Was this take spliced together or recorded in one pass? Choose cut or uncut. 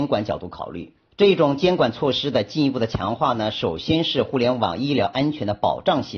cut